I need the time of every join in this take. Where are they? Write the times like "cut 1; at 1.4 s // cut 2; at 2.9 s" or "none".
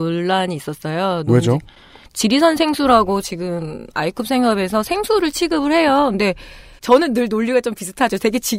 none